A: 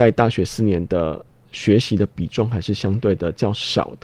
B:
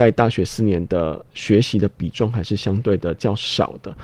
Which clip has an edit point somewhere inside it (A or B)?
B